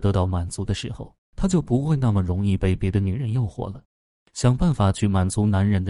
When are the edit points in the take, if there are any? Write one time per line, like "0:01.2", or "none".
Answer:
none